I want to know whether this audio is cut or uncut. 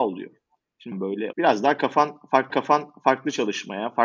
cut